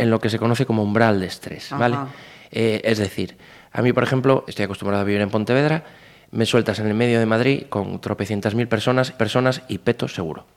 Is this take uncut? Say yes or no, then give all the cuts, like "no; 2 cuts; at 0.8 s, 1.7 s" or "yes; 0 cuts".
no; 2 cuts; at 4.4 s, 9.2 s